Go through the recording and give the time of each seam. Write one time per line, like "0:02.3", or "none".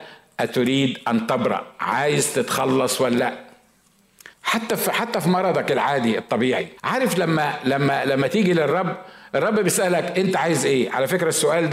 0:04.3
0:06.8